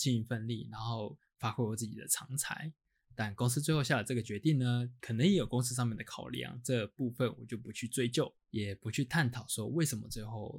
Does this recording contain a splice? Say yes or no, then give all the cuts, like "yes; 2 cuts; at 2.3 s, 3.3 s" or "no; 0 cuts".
yes; 2 cuts; at 5.0 s, 8.4 s